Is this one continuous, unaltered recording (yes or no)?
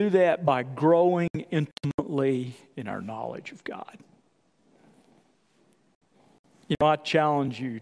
yes